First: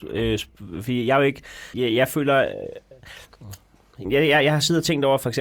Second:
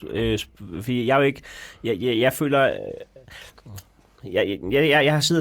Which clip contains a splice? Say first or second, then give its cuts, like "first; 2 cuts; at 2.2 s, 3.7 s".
first; 2 cuts; at 1.7 s, 4.0 s